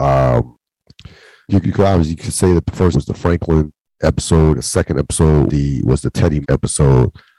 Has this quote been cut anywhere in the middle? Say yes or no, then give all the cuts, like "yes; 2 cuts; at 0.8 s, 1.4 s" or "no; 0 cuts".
yes; 5 cuts; at 1.5 s, 2.9 s, 4.5 s, 5.5 s, 6.4 s